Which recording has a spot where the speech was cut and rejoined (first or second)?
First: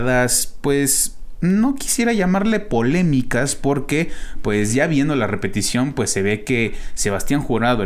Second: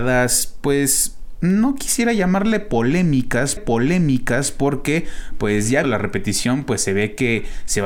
second